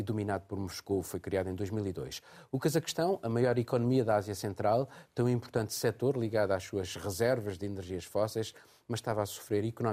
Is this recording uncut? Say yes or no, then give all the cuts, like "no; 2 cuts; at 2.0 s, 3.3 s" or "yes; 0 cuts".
yes; 0 cuts